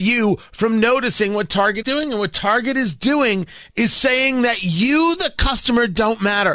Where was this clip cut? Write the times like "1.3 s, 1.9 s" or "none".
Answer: 1.8 s